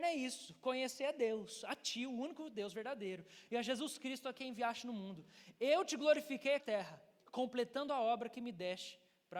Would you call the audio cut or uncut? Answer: cut